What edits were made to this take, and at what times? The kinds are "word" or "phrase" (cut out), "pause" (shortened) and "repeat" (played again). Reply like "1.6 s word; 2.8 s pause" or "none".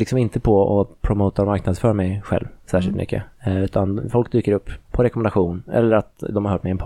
4.8 s pause

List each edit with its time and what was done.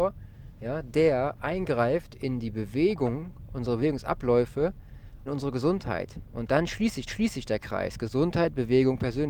5.3 s phrase; 7.1 s repeat

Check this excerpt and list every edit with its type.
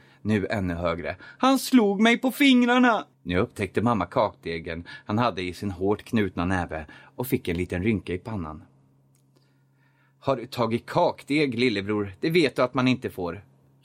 3.1 s pause

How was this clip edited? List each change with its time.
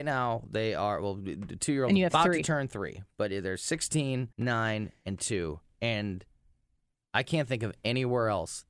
4.3 s pause

